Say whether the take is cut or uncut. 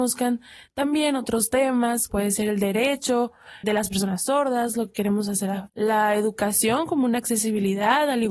cut